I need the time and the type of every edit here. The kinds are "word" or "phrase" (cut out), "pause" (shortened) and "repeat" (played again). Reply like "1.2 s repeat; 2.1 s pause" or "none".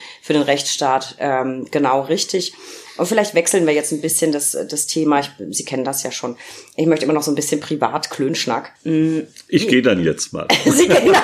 8.8 s pause